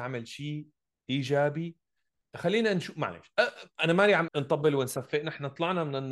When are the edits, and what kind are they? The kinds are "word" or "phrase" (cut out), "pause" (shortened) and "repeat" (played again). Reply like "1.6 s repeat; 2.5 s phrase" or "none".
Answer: 4.3 s word